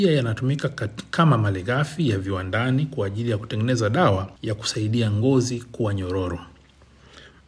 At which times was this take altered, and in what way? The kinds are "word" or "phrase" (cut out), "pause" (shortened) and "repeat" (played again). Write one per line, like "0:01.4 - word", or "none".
0:04.4 - pause

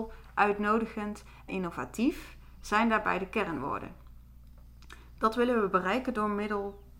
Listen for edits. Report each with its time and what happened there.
0:01.5 - word

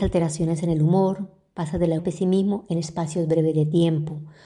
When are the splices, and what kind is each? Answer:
0:02.0 - word

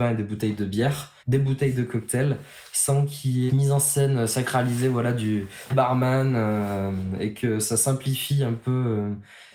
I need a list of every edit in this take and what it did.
0:01.2 - pause
0:03.5 - phrase
0:05.7 - word

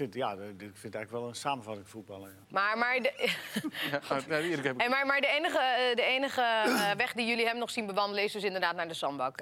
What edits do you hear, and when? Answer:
0:02.4 - pause

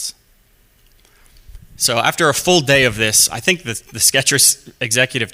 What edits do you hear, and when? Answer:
none

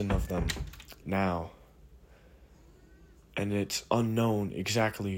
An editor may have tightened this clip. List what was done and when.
0:01.0 - phrase

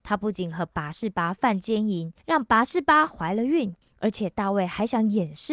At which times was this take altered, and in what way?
0:02.2 - pause
0:03.8 - pause

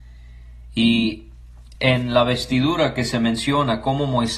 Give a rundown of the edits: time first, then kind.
none

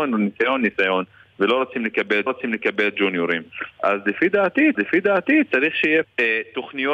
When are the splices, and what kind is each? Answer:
0:02.3 - repeat
0:04.7 - repeat
0:06.0 - word

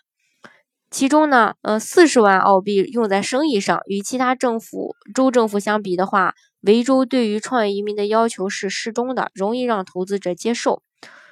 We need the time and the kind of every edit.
0:01.6 - pause

